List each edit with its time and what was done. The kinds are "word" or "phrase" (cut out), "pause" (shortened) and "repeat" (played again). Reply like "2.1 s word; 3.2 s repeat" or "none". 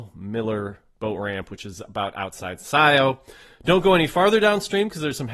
none